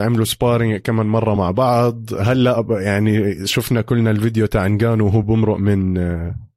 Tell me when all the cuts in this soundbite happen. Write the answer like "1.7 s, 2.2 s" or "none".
none